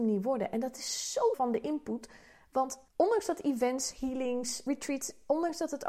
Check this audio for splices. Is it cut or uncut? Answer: cut